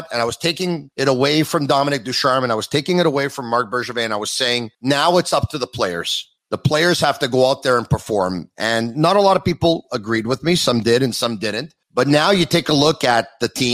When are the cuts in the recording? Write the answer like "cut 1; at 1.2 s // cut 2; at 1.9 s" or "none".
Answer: cut 1; at 0.9 s // cut 2; at 4.7 s // cut 3; at 6.4 s // cut 4; at 11.8 s